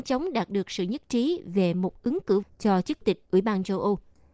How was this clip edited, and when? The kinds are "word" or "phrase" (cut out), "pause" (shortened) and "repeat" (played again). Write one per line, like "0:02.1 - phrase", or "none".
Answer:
0:02.4 - word
0:03.0 - word